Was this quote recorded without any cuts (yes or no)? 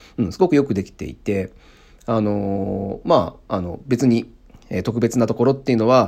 yes